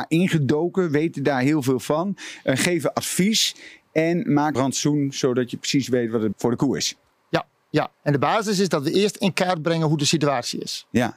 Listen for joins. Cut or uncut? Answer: cut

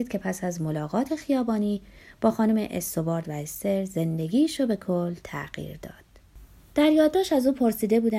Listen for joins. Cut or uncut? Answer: uncut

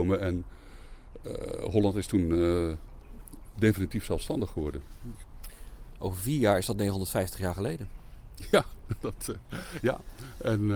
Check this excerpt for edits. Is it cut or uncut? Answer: uncut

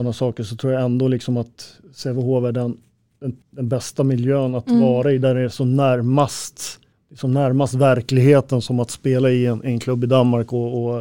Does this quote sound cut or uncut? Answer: cut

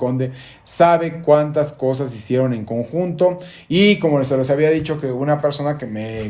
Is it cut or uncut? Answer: uncut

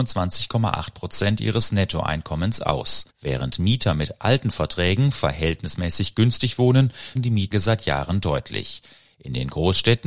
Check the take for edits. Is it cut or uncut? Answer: cut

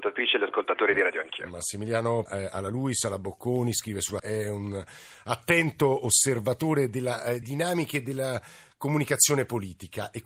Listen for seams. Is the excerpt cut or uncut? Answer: cut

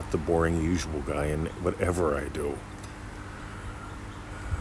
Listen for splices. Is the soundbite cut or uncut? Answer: uncut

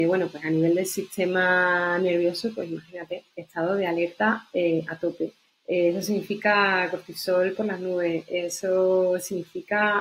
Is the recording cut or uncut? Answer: cut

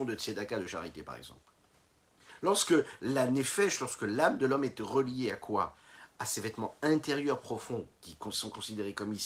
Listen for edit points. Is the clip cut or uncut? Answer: uncut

